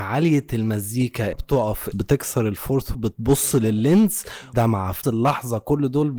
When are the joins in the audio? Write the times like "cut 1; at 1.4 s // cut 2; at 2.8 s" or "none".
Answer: cut 1; at 1.3 s // cut 2; at 1.9 s // cut 3; at 2.9 s // cut 4; at 4.5 s // cut 5; at 5.0 s